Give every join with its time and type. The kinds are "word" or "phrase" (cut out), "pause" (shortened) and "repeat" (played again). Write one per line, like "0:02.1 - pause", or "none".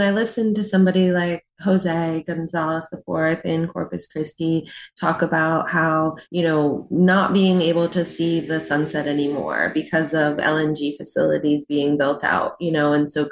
0:06.3 - pause